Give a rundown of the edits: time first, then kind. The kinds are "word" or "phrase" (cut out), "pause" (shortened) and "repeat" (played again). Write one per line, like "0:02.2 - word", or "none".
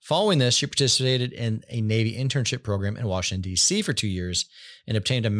none